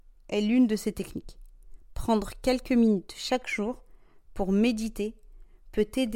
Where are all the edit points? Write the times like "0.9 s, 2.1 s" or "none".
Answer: none